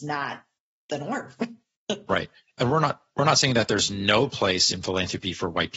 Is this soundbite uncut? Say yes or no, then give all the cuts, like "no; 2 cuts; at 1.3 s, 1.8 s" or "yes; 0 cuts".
yes; 0 cuts